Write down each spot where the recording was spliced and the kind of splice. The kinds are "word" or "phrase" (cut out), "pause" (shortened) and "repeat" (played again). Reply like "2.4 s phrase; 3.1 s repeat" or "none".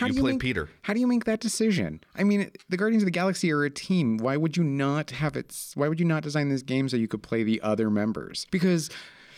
2.0 s pause; 8.5 s pause